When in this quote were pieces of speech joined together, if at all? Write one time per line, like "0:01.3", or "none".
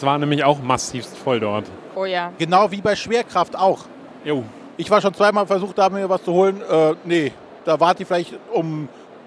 0:07.6